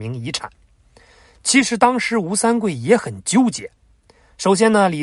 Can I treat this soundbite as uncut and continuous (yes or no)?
yes